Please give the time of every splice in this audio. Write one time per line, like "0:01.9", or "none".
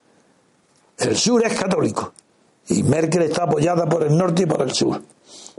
0:02.5